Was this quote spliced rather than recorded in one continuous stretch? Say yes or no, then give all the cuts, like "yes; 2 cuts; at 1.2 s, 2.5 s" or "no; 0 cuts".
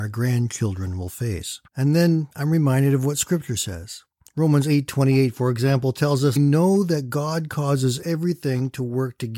yes; 3 cuts; at 1.7 s, 4.2 s, 6.4 s